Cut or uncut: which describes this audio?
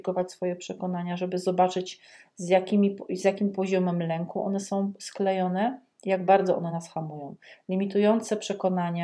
uncut